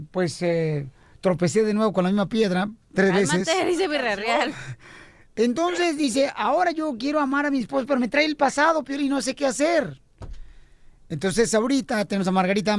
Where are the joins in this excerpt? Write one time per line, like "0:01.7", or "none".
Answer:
none